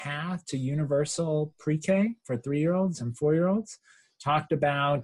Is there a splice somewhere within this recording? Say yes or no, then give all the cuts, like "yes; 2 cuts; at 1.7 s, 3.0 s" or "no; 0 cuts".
no; 0 cuts